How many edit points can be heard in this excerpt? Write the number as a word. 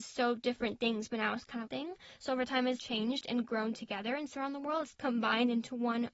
four